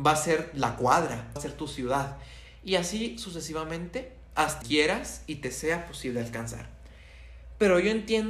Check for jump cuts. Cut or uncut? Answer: cut